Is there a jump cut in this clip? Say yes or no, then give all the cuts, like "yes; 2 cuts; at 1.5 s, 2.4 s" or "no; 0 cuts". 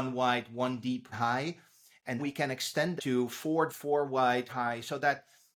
yes; 5 cuts; at 1.1 s, 2.2 s, 3.0 s, 3.7 s, 4.5 s